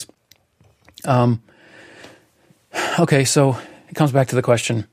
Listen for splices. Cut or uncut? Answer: uncut